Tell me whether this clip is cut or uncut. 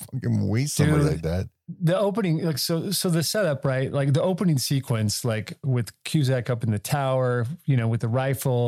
uncut